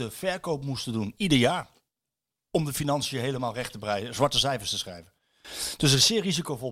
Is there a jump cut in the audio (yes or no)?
no